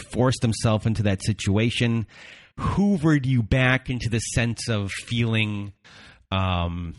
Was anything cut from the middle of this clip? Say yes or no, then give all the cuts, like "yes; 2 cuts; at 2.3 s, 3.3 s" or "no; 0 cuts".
no; 0 cuts